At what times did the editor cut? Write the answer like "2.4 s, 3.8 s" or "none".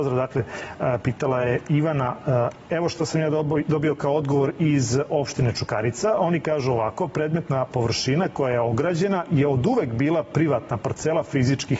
none